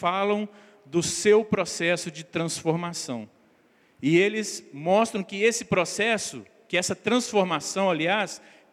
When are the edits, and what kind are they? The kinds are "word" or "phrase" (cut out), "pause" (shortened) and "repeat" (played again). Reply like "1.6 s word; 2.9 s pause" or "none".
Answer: none